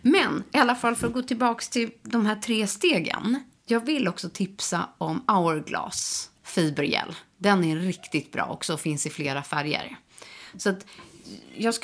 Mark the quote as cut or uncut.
cut